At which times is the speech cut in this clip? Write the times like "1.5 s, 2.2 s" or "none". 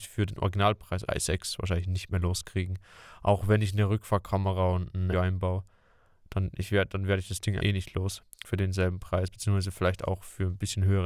1.1 s, 5.1 s, 7.6 s, 8.3 s